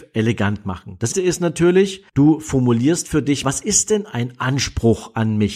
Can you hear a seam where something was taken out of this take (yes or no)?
yes